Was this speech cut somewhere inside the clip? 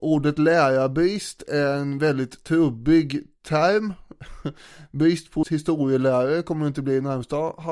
yes; 1 cut; at 5.4 s

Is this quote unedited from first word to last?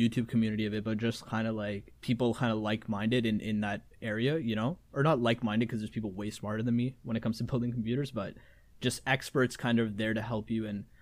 no; 1 cut; at 2.0 s

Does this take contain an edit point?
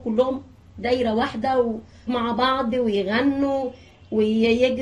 yes; 1 cut; at 2.1 s

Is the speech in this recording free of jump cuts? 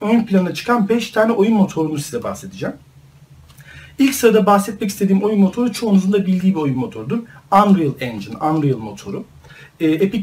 yes; 0 cuts

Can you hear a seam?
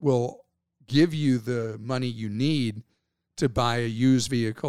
no; 0 cuts

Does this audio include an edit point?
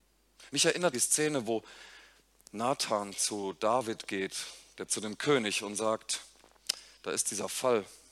yes; 2 cuts; at 0.9 s, 4.9 s

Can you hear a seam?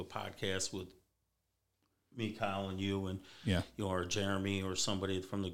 no; 0 cuts

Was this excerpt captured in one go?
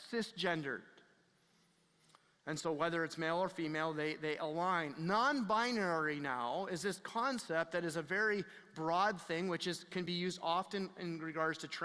yes; 0 cuts

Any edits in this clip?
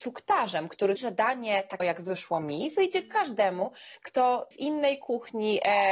yes; 3 cuts; at 1.0 s, 1.8 s, 4.5 s

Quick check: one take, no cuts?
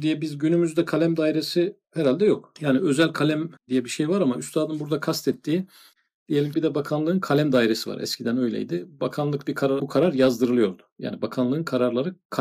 no; 3 cuts; at 3.6 s, 6.5 s, 9.8 s

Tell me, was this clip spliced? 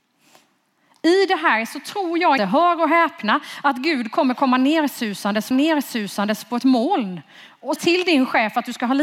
yes; 3 cuts; at 2.4 s, 5.5 s, 7.8 s

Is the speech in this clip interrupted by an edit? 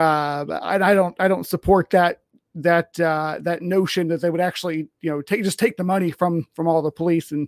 no; 0 cuts

